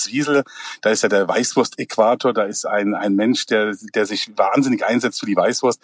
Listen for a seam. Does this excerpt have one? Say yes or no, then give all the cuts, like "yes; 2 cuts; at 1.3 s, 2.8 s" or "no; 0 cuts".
yes; 2 cuts; at 3.0 s, 4.4 s